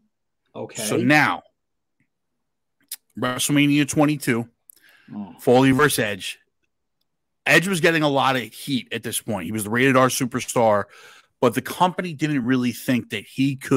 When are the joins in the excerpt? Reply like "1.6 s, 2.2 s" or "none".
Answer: none